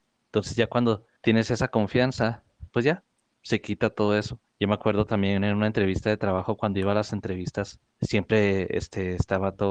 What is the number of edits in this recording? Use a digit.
5